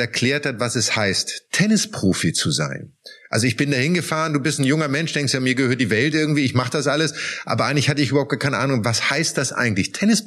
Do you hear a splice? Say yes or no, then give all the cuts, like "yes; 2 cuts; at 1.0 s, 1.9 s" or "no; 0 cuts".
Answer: no; 0 cuts